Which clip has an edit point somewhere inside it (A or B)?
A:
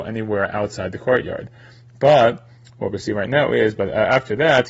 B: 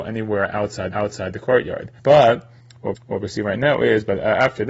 B